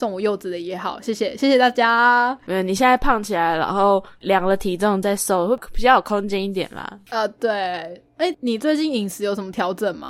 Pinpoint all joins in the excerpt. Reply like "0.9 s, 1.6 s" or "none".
8.3 s